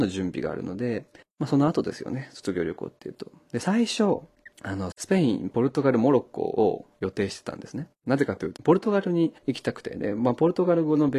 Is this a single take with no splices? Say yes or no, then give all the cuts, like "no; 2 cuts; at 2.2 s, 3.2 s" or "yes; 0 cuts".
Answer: no; 6 cuts; at 1.2 s, 4.5 s, 4.9 s, 8.0 s, 8.6 s, 9.4 s